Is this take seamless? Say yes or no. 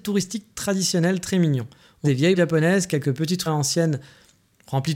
no